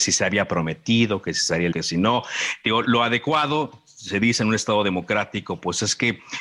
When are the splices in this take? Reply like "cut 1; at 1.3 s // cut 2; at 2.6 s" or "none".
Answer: cut 1; at 1.7 s // cut 2; at 2.8 s

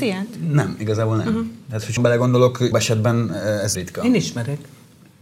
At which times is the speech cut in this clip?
cut 1; at 2.0 s // cut 2; at 2.7 s // cut 3; at 3.7 s

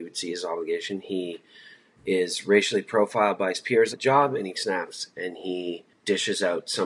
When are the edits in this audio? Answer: cut 1; at 3.9 s // cut 2; at 4.5 s

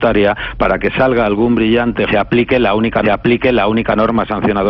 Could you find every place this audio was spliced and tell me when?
cut 1; at 2.1 s // cut 2; at 3.0 s

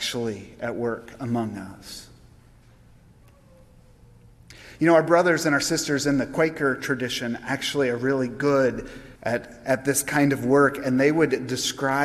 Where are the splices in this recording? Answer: cut 1; at 9.2 s

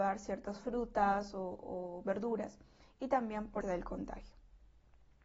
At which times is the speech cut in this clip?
cut 1; at 3.6 s

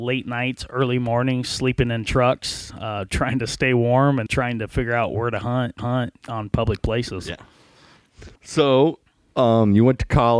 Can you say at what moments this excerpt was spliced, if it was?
cut 1; at 4.3 s // cut 2; at 5.8 s // cut 3; at 8.4 s

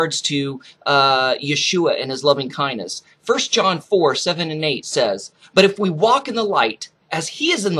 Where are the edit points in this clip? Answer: none

